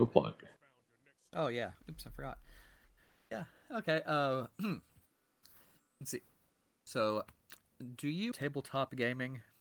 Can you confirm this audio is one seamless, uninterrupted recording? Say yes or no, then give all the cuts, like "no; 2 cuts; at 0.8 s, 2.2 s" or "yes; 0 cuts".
no; 1 cut; at 8.3 s